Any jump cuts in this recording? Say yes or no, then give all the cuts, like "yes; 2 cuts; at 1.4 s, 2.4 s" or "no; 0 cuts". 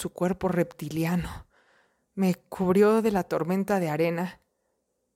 no; 0 cuts